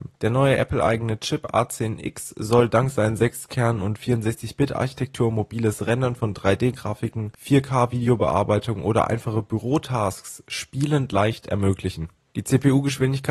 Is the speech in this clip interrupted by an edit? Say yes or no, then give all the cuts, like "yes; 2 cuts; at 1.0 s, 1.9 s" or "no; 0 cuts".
no; 0 cuts